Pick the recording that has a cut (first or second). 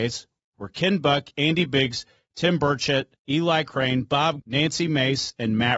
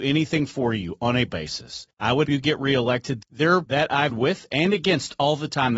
second